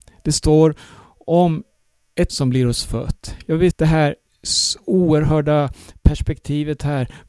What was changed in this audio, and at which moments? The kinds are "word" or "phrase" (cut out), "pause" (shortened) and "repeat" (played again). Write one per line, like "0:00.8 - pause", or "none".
0:02.3 - word
0:03.7 - word